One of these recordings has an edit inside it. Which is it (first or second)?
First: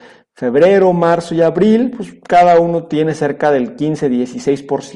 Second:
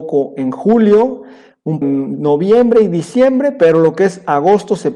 second